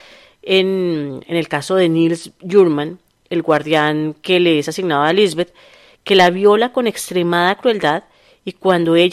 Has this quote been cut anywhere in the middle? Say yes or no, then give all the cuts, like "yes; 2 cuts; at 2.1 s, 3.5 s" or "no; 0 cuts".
no; 0 cuts